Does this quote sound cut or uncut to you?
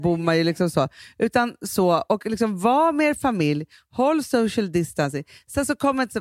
uncut